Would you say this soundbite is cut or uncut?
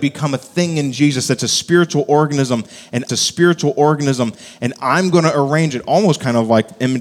cut